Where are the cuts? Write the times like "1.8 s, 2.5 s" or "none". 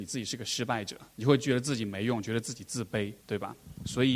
1.1 s, 3.2 s